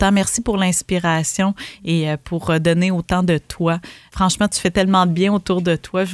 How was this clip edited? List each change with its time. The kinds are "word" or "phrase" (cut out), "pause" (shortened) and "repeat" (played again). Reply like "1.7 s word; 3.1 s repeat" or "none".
none

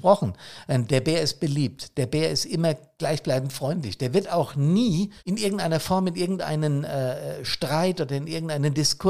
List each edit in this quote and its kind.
5.2 s pause

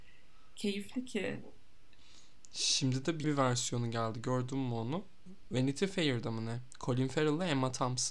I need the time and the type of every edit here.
3.2 s word

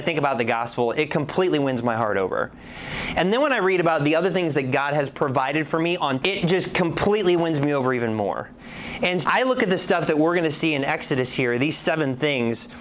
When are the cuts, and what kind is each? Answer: 6.2 s phrase; 9.2 s word

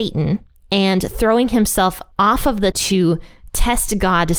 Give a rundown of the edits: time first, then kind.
2.1 s pause; 2.7 s word

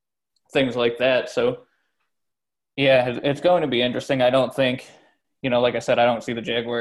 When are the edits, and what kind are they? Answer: none

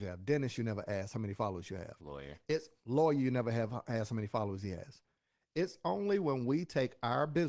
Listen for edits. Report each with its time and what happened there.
none

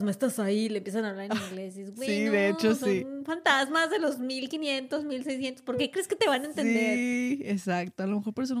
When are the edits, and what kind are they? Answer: none

